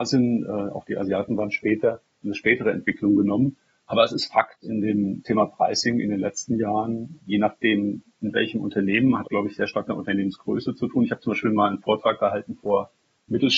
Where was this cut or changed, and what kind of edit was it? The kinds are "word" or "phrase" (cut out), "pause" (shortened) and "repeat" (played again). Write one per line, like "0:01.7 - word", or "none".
0:02.2 - word
0:04.6 - word
0:05.2 - word
0:07.2 - word
0:09.2 - word
0:09.9 - word